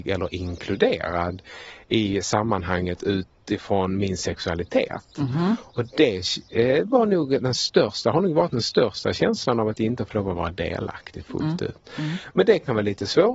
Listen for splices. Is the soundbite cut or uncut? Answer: uncut